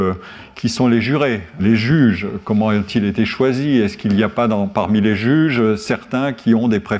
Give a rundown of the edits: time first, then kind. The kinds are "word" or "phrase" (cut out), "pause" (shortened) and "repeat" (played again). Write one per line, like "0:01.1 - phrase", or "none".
0:01.6 - word